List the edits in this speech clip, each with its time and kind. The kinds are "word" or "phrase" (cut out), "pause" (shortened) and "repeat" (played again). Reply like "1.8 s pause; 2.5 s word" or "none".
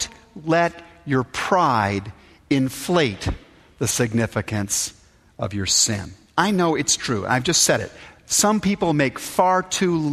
none